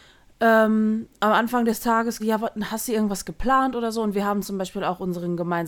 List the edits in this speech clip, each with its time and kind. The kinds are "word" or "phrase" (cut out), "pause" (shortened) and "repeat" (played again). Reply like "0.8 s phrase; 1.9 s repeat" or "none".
2.2 s word